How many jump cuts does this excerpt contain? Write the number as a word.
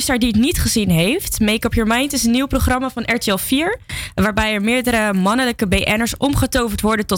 zero